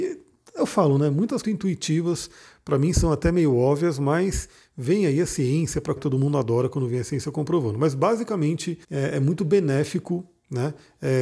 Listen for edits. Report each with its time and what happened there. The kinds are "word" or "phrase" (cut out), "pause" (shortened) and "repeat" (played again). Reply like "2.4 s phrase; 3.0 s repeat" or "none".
1.4 s phrase; 6.0 s word; 8.8 s pause